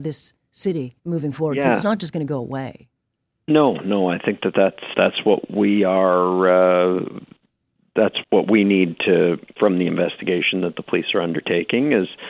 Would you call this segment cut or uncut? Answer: cut